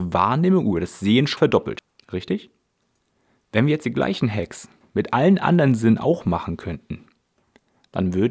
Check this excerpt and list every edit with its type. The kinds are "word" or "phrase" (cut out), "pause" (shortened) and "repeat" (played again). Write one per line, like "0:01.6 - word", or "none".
0:01.4 - word